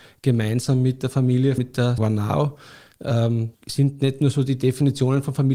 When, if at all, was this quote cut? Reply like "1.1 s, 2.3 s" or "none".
1.6 s, 2.0 s, 3.5 s